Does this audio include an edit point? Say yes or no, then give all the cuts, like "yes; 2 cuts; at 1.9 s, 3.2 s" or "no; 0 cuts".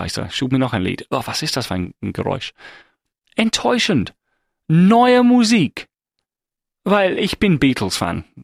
no; 0 cuts